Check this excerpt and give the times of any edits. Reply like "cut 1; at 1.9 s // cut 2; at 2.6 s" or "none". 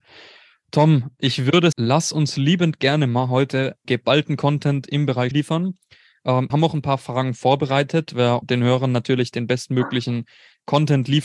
cut 1; at 1.7 s // cut 2; at 3.8 s // cut 3; at 5.3 s // cut 4; at 6.5 s // cut 5; at 8.1 s // cut 6; at 8.4 s